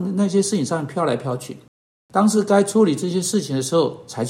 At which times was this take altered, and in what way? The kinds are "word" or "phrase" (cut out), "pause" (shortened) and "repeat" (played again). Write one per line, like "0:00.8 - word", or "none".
none